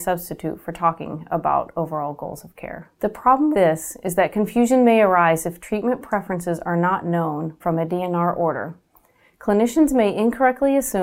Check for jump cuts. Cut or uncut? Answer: cut